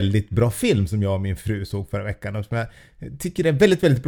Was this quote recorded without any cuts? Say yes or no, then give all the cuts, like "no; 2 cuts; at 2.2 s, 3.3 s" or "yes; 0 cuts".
yes; 0 cuts